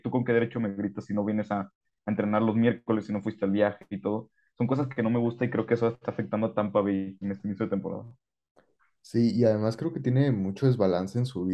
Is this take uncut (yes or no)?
yes